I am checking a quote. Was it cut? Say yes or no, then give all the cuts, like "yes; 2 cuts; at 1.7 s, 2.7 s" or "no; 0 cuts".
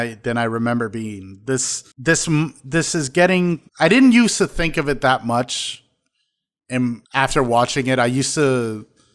yes; 3 cuts; at 1.9 s, 3.7 s, 7.0 s